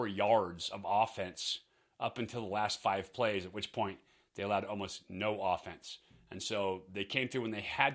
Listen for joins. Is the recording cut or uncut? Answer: uncut